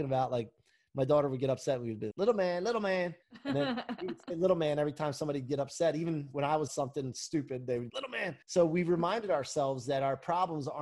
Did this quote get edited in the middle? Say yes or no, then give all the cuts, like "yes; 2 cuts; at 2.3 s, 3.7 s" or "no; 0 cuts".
yes; 5 cuts; at 2.1 s, 3.2 s, 6.7 s, 7.9 s, 8.4 s